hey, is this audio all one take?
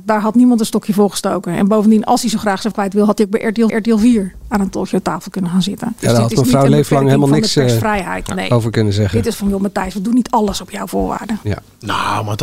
no; 3 cuts; at 2.7 s, 3.7 s, 9.3 s

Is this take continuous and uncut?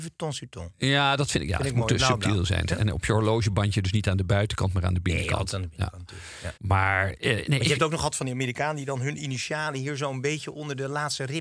no; 1 cut; at 6.6 s

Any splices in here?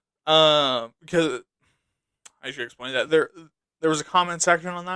no; 0 cuts

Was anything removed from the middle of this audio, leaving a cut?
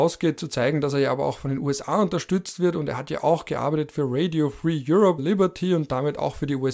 yes; 1 cut; at 5.2 s

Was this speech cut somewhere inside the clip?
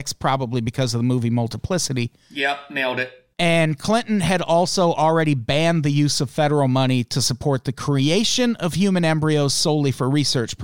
yes; 1 cut; at 3.3 s

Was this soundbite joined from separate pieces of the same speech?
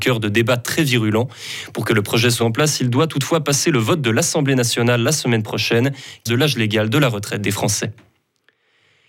yes; 2 cuts; at 2.4 s, 6.3 s

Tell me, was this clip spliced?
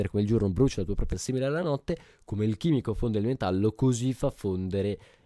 yes; 1 cut; at 1.1 s

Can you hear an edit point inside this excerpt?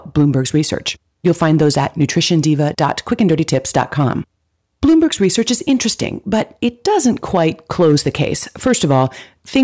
no; 0 cuts

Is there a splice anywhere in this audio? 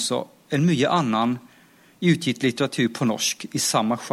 no; 0 cuts

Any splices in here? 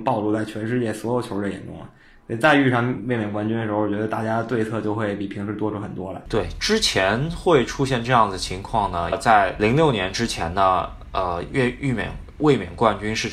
yes; 1 cut; at 9.1 s

